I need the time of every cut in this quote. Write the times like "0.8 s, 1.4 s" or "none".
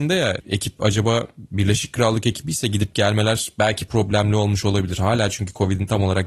none